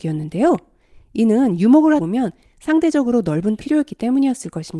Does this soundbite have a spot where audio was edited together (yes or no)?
yes